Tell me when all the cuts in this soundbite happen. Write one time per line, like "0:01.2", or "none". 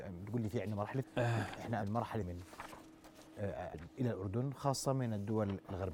0:01.0
0:01.8
0:02.2
0:03.7